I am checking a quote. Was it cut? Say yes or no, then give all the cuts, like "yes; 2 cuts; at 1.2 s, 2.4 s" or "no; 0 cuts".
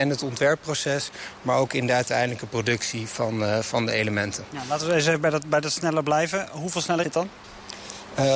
yes; 1 cut; at 7.0 s